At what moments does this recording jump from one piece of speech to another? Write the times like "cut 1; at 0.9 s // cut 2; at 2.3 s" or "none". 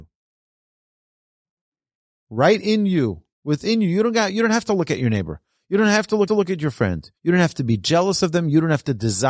cut 1; at 3.3 s // cut 2; at 6.3 s // cut 3; at 7.2 s